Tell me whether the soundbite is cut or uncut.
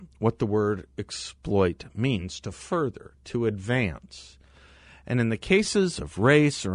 uncut